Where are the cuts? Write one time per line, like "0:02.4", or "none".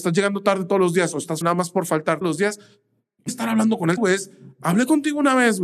0:01.4
0:02.2
0:03.3
0:04.0